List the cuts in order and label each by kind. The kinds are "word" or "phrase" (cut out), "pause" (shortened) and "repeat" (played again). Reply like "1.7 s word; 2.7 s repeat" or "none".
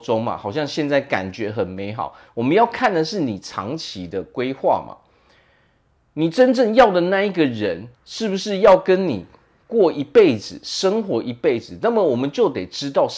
7.9 s pause

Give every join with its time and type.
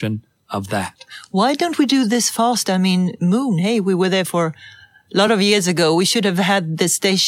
none

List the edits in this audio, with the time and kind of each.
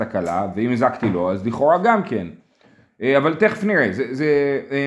none

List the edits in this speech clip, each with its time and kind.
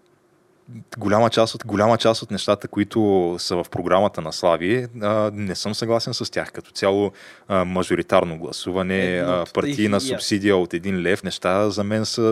1.6 s repeat; 11.2 s word

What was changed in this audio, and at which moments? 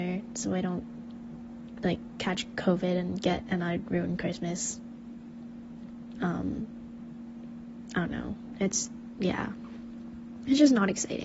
3.4 s phrase

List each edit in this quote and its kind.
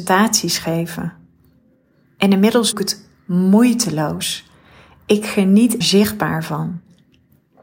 2.7 s word; 5.8 s word

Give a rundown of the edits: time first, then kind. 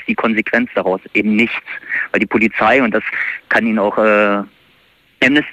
none

